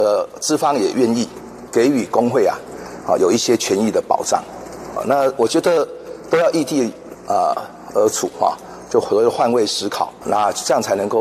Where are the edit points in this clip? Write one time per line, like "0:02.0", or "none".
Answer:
0:01.7
0:05.0